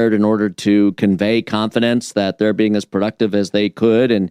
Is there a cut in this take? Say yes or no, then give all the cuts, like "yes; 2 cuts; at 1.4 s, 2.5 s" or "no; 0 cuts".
no; 0 cuts